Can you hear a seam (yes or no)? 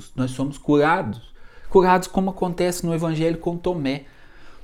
no